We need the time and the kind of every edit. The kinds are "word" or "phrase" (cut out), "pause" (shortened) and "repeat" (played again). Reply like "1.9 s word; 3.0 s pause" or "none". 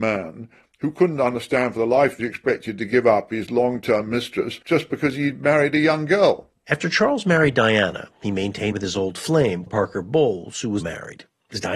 2.2 s phrase; 4.6 s pause; 8.7 s phrase; 9.7 s word; 10.8 s word